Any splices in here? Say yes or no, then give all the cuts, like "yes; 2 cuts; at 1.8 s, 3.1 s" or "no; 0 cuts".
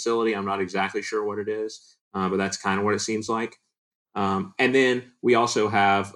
no; 0 cuts